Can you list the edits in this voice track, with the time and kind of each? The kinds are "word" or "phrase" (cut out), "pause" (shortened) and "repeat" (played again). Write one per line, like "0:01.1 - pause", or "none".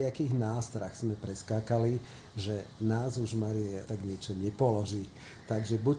0:03.9 - word

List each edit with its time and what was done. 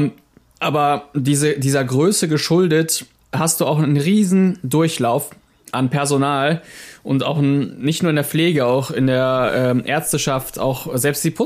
none

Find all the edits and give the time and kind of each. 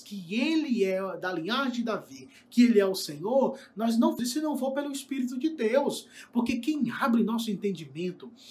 0:04.2 - word

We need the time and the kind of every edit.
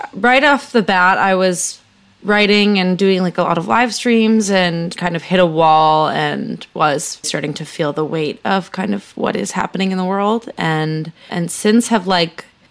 0:05.0 - word
0:07.2 - word
0:11.3 - word

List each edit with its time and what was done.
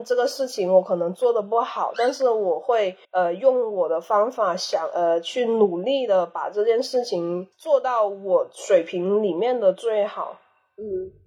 0:03.0 - pause

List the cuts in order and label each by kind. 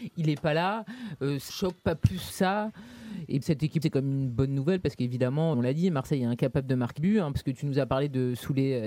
0:01.5 - word
0:02.3 - word
0:03.4 - word
0:03.8 - word
0:05.5 - word
0:07.0 - word

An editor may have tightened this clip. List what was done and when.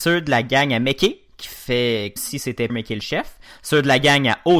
0:02.2 - word
0:02.7 - word

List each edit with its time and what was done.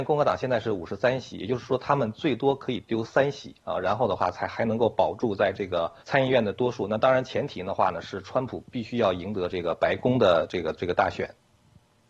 0:06.0 - pause

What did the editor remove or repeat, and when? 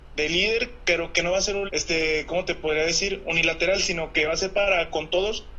0:01.7 - word

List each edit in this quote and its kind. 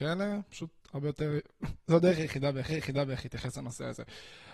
0:02.7 - repeat

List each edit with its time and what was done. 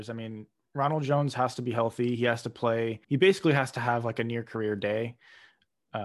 0:03.0 - pause

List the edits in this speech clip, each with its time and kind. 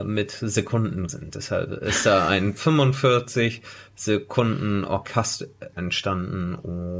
0:01.1 - word
0:05.7 - word

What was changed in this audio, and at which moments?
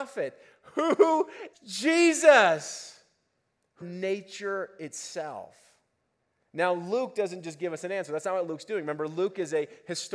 0:01.5 - phrase
0:03.8 - phrase

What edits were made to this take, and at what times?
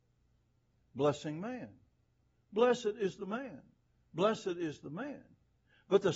none

